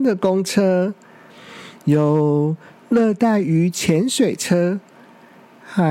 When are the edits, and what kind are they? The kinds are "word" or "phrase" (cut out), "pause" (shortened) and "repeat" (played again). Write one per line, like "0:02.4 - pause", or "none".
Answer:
none